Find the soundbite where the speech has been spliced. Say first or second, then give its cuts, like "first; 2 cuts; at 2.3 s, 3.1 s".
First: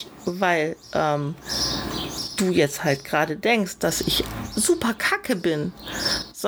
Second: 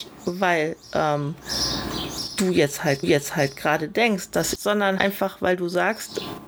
second; 3 cuts; at 3.0 s, 4.5 s, 5.0 s